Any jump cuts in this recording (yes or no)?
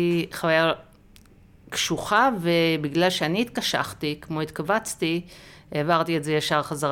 no